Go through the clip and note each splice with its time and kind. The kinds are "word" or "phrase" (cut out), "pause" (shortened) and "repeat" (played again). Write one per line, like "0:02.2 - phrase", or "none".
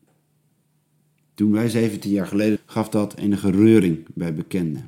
0:02.6 - phrase